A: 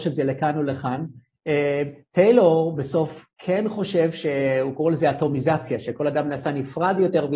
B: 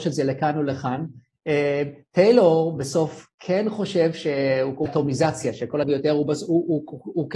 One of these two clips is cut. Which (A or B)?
B